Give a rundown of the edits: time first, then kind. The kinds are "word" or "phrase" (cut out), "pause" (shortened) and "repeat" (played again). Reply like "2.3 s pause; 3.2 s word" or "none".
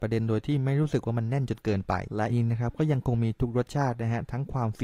2.3 s word